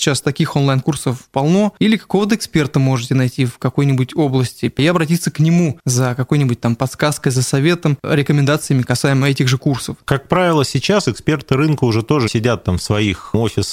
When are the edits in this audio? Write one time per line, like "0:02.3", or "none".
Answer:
0:10.0
0:12.3